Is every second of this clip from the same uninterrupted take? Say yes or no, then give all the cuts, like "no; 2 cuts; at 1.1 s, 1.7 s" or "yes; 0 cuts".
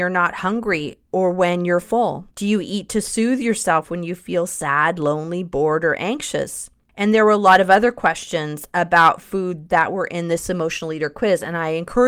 no; 2 cuts; at 1.0 s, 2.3 s